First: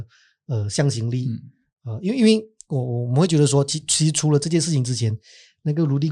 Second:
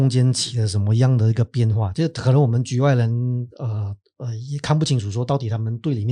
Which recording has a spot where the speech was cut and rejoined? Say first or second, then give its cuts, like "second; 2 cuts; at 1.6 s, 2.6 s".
second; 1 cut; at 3.5 s